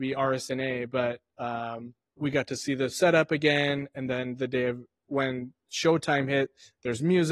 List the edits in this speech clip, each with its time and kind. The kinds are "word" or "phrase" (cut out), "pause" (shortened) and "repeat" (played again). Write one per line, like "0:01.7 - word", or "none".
0:02.2 - word